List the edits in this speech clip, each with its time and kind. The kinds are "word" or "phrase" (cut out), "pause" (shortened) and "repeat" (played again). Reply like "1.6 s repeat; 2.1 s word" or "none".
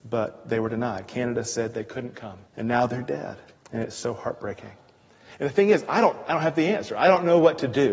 2.5 s pause; 3.6 s pause